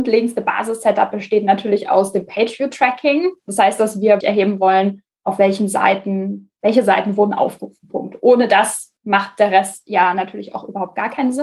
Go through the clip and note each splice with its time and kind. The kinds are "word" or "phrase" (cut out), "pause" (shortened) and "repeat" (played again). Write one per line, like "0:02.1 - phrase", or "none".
0:04.2 - word
0:09.0 - pause